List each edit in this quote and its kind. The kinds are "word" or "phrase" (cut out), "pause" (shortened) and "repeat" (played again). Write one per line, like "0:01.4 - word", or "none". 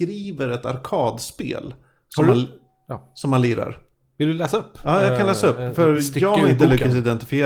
none